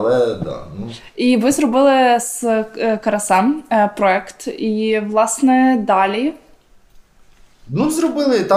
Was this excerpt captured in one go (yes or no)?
yes